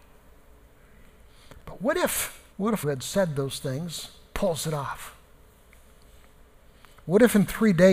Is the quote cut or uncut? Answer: cut